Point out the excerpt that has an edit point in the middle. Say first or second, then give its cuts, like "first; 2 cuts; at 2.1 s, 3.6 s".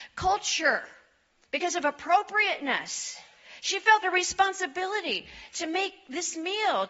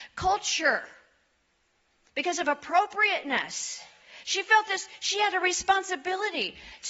first; 2 cuts; at 1.3 s, 4.0 s